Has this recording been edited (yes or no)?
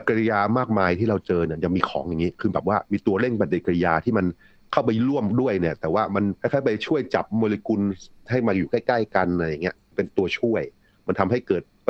yes